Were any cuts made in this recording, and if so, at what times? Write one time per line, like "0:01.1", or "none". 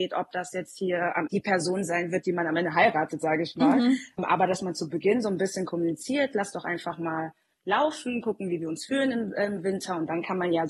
0:01.3